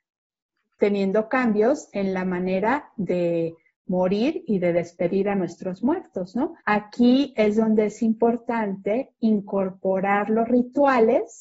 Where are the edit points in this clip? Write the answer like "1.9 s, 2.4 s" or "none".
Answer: 6.6 s

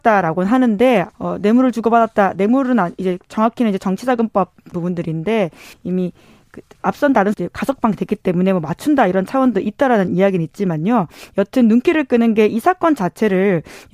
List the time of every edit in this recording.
1.1 s, 4.7 s, 5.7 s, 7.3 s

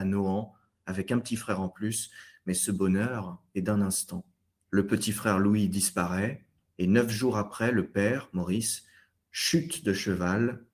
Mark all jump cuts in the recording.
none

